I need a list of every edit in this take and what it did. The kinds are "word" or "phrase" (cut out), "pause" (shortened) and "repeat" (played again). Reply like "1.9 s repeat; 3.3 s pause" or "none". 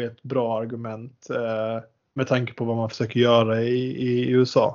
2.0 s pause